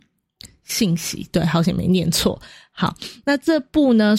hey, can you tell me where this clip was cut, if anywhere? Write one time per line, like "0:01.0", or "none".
none